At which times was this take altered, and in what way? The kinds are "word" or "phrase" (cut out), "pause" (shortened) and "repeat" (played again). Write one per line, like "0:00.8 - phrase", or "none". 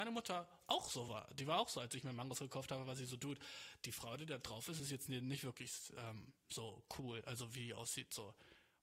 none